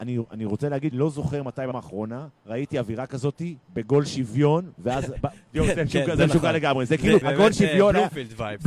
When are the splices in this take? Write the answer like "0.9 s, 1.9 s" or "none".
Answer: 0.9 s, 1.7 s, 2.4 s, 3.6 s, 7.2 s